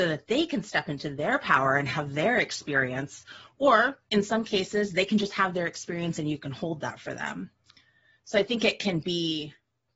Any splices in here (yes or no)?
no